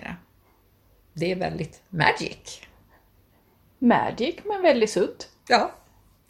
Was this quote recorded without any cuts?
yes; 0 cuts

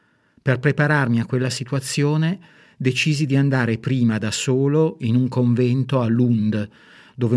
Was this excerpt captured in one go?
yes; 0 cuts

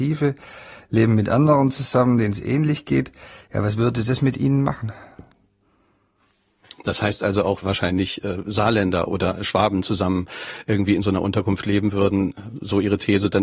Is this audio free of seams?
no; 1 cut; at 7.6 s

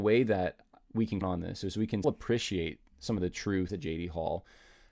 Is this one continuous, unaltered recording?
no; 3 cuts; at 1.2 s, 2.0 s, 3.7 s

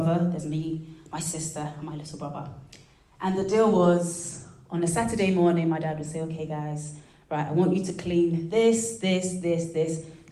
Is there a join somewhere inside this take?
no; 0 cuts

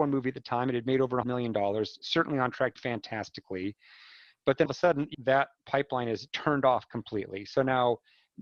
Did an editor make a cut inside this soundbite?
yes; 6 cuts; at 1.2 s, 2.0 s, 2.8 s, 4.7 s, 5.1 s, 6.3 s

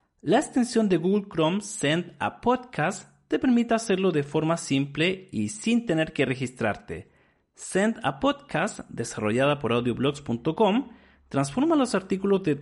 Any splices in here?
no; 0 cuts

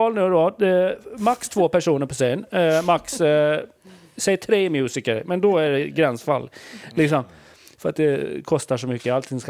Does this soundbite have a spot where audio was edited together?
no; 0 cuts

